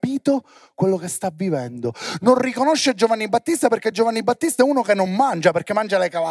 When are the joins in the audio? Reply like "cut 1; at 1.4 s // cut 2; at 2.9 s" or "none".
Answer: none